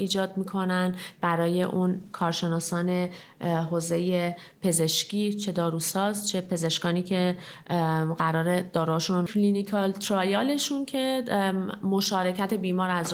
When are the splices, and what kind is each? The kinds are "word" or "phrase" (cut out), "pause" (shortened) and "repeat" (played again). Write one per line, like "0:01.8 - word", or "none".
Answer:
0:09.3 - phrase